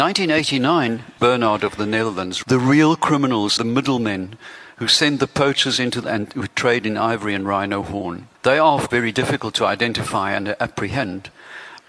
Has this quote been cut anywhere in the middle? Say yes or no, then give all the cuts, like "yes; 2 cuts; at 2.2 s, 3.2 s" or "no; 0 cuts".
yes; 6 cuts; at 1.2 s, 2.4 s, 3.6 s, 6.0 s, 8.3 s, 8.9 s